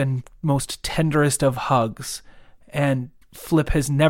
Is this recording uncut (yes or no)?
yes